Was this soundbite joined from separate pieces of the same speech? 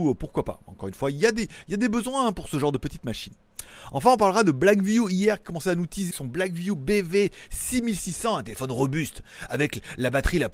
yes; 1 cut; at 6.1 s

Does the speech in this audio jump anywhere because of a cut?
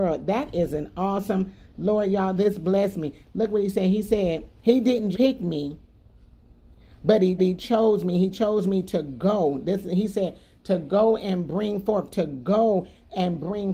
yes; 3 cuts; at 4.6 s, 5.1 s, 7.4 s

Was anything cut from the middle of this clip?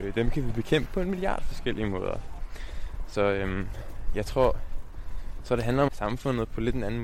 yes; 1 cut; at 5.9 s

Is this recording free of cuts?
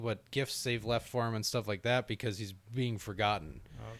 yes; 0 cuts

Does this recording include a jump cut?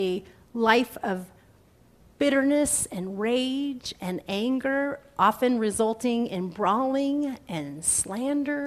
no; 0 cuts

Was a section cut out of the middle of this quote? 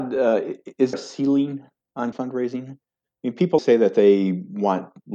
yes; 3 cuts; at 0.9 s, 2.1 s, 3.6 s

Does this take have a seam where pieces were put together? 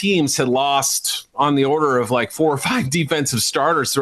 no; 0 cuts

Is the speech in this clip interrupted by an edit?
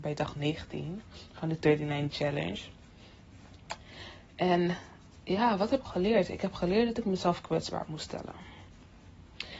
yes; 2 cuts; at 2.1 s, 5.8 s

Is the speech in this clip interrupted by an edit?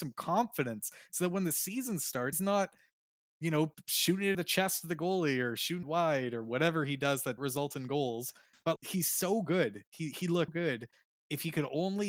yes; 6 cuts; at 2.3 s, 4.3 s, 5.8 s, 7.4 s, 8.8 s, 10.5 s

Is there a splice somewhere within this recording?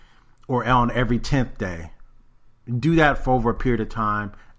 no; 0 cuts

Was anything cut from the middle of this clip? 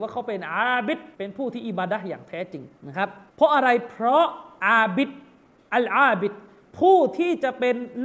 yes; 3 cuts; at 1.1 s, 2.8 s, 3.3 s

